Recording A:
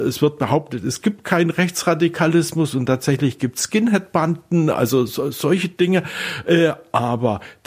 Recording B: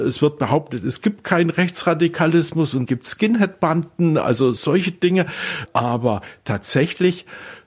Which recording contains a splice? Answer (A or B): B